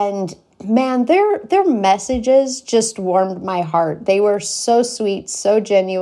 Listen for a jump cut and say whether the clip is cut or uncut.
uncut